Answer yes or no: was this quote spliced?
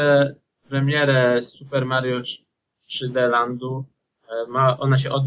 no